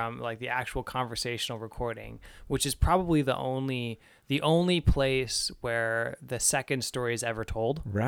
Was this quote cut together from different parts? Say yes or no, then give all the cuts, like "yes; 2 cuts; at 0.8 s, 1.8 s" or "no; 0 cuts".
no; 0 cuts